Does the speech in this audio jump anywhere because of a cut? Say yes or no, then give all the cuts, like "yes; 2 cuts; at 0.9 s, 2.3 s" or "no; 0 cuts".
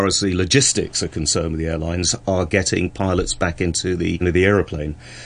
yes; 1 cut; at 4.2 s